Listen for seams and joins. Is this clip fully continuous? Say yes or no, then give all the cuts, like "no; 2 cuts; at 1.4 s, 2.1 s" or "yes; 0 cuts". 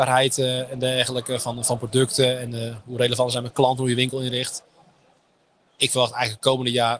yes; 0 cuts